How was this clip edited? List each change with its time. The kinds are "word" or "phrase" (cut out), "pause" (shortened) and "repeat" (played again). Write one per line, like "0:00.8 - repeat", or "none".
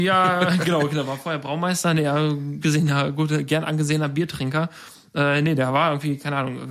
0:02.6 - word